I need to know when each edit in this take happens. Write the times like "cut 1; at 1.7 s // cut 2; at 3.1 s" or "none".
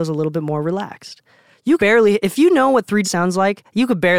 cut 1; at 1.8 s // cut 2; at 3.0 s